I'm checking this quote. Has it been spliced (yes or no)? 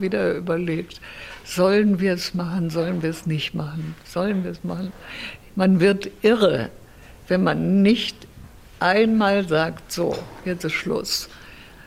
no